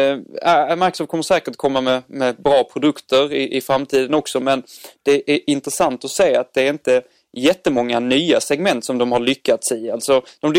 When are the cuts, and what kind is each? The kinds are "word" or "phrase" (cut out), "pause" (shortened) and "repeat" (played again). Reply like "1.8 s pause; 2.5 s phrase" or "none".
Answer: none